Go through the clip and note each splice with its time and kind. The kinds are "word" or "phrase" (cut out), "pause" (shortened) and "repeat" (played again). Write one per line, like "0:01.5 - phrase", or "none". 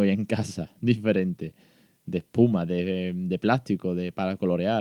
none